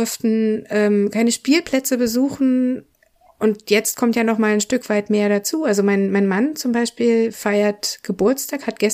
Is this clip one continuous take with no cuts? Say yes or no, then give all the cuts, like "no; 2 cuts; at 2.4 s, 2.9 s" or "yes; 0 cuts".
yes; 0 cuts